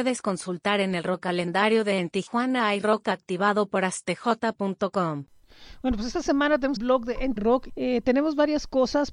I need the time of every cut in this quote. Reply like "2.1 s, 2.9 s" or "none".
6.8 s, 7.4 s, 7.7 s